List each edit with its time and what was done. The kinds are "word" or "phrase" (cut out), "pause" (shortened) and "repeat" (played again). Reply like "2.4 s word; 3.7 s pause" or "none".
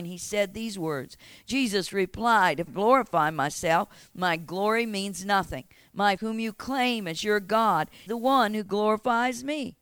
2.7 s word; 6.2 s word; 8.1 s word